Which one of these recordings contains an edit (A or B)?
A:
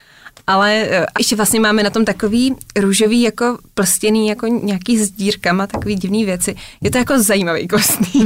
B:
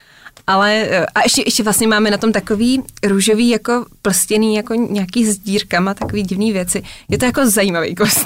A